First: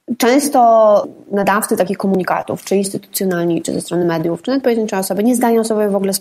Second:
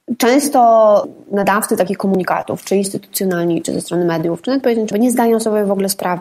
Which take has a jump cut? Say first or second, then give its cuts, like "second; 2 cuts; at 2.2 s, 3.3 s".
second; 1 cut; at 4.9 s